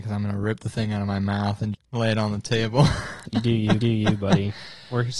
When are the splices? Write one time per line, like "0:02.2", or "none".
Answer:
0:01.7
0:03.8